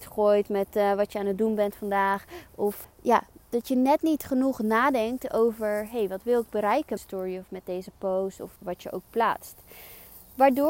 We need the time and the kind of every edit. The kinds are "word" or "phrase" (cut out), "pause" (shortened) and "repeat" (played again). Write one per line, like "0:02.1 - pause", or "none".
0:02.8 - word
0:07.0 - phrase
0:08.6 - word

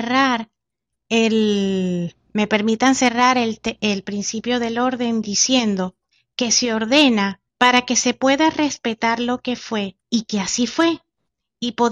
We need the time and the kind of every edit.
0:02.3 - pause
0:06.1 - pause
0:07.5 - pause
0:10.0 - pause

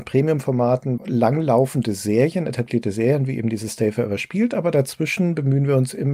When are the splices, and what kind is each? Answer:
0:01.0 - phrase

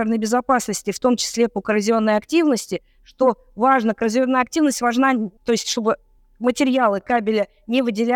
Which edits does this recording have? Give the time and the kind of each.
0:05.4 - pause

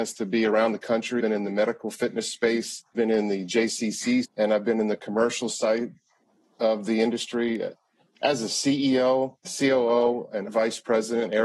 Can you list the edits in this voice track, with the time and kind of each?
0:01.2 - word
0:02.9 - word
0:04.2 - word
0:09.4 - word
0:10.5 - word

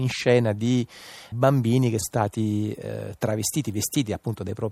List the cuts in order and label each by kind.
0:01.3 - word
0:02.0 - word

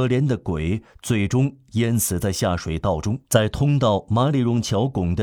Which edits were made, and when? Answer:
0:03.2 - pause

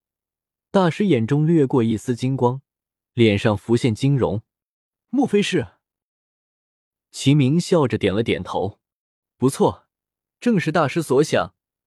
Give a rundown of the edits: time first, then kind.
none

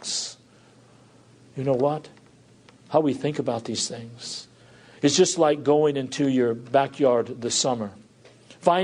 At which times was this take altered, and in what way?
none

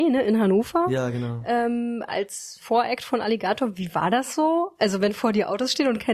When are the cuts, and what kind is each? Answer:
none

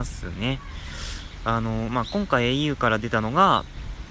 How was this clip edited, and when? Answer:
none

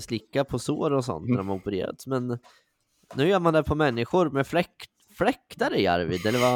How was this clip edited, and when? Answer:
none

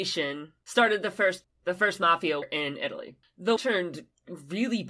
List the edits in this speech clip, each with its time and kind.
0:01.4 - word
0:02.4 - word
0:03.6 - word

